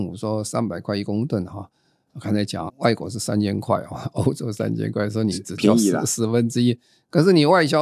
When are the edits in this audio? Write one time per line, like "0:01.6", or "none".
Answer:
0:02.7